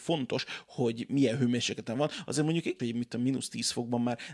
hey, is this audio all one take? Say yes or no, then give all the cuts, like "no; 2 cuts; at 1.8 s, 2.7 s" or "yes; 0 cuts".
no; 1 cut; at 2.8 s